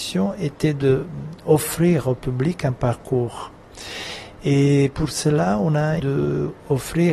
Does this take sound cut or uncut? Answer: cut